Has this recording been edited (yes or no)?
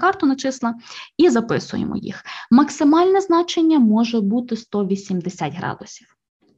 no